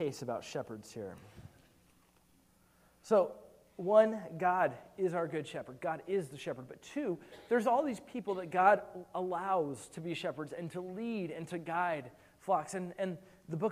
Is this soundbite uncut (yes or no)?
yes